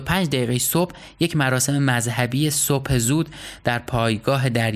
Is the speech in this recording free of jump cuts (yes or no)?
yes